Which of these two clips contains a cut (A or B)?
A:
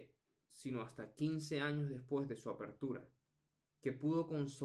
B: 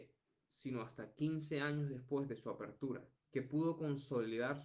B